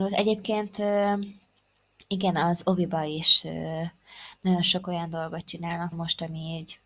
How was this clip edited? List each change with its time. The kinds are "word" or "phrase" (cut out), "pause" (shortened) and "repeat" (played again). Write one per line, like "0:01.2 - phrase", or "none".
0:05.9 - word